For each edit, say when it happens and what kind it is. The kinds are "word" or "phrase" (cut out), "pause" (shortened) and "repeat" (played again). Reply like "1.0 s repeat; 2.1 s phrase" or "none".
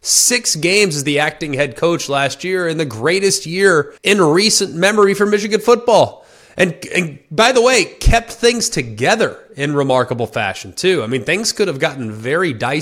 4.0 s pause